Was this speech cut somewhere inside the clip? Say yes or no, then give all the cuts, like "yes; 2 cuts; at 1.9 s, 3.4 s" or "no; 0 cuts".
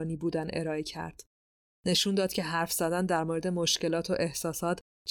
no; 0 cuts